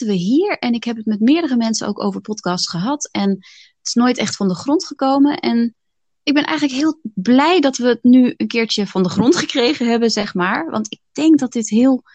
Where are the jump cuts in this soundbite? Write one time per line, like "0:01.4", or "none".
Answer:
none